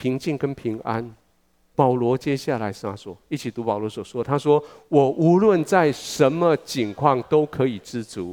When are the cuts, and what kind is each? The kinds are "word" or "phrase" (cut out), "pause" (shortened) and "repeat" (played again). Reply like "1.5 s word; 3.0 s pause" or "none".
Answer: none